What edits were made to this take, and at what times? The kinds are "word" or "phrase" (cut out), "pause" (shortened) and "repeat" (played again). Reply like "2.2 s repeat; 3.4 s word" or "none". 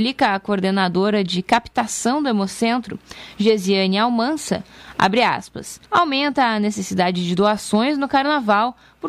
5.9 s pause

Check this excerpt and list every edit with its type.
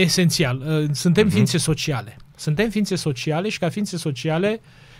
none

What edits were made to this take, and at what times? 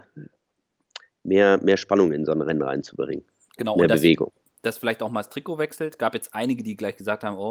none

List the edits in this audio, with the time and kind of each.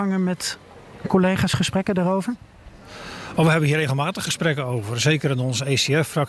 none

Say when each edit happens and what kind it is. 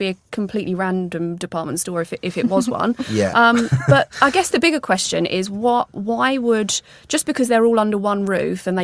none

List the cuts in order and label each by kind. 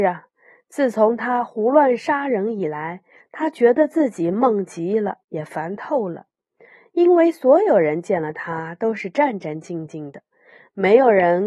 5.2 s pause

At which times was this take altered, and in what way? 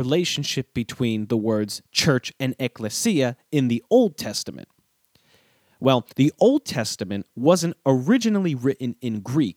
6.1 s pause

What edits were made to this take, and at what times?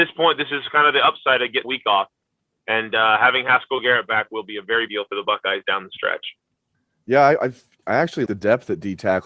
1.6 s word; 4.9 s word; 8.3 s word

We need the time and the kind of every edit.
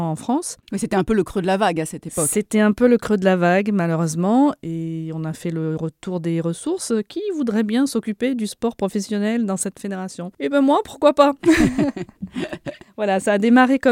12.8 s pause

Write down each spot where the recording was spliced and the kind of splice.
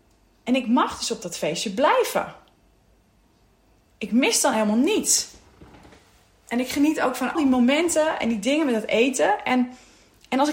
7.3 s word

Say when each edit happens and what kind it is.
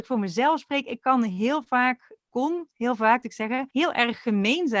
3.2 s word; 3.7 s pause

